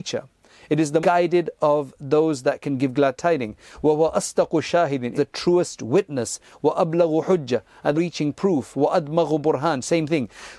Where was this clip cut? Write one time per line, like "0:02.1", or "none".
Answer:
0:01.0
0:05.2
0:07.9